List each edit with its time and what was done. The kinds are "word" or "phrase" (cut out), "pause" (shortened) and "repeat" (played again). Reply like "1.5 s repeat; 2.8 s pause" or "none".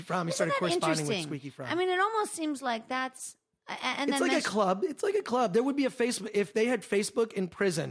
none

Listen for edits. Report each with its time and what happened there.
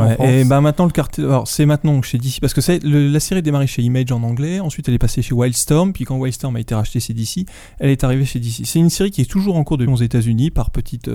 9.9 s word

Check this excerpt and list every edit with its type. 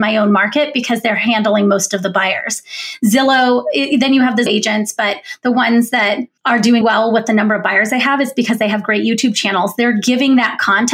4.5 s word; 6.4 s pause; 6.8 s word

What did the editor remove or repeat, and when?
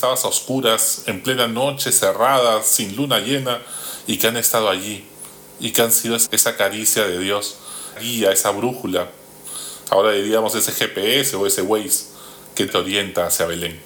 6.3 s word; 8.0 s word; 12.7 s word

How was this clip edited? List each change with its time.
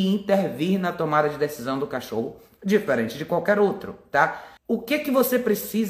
4.6 s pause

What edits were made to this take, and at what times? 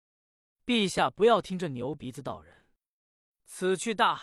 none

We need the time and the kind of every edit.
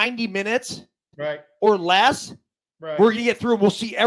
none

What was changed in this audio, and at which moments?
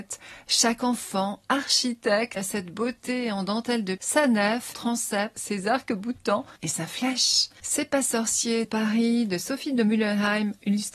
2.4 s word; 4.0 s word; 4.7 s word; 6.6 s pause; 8.6 s phrase

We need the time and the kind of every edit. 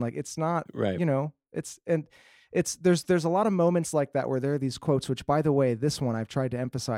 none

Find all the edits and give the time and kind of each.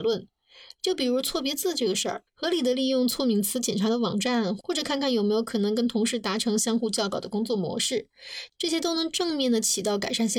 2.3 s pause

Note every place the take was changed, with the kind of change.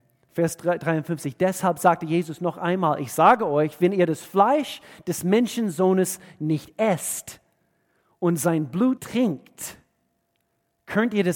9.0 s word

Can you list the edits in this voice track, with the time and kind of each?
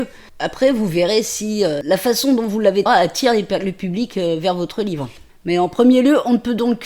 2.9 s phrase

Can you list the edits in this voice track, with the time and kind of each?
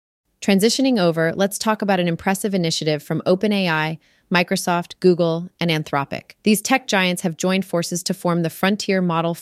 6.4 s pause

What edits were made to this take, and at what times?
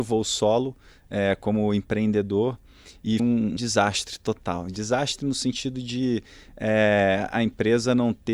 3.2 s word; 3.6 s word

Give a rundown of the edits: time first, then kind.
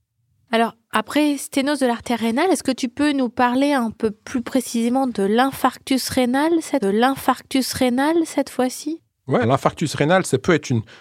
6.8 s repeat; 9.4 s word

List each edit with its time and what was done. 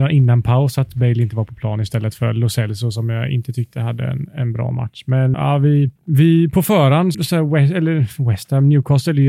5.3 s word; 6.0 s pause; 7.1 s word

